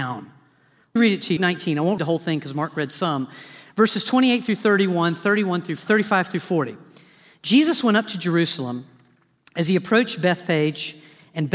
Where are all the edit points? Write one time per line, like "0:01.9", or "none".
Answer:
0:01.0
0:01.4
0:02.0
0:05.9